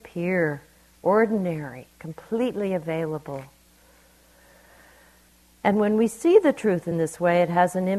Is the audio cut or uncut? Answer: uncut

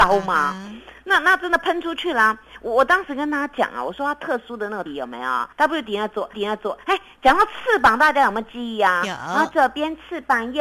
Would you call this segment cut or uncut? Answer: cut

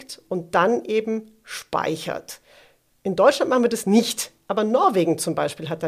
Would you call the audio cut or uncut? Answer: uncut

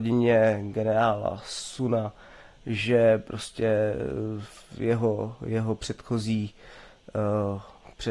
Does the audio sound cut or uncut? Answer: uncut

